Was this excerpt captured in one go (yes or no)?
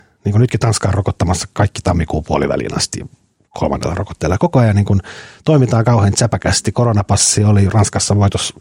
yes